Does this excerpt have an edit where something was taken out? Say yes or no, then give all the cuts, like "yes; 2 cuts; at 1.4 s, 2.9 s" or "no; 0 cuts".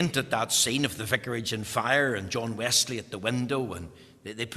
no; 0 cuts